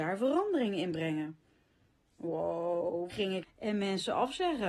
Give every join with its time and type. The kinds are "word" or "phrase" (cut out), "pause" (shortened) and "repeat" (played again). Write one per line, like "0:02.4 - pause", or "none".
0:03.1 - word
0:03.4 - word